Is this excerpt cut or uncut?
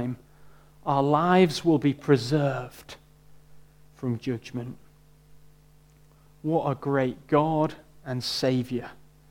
uncut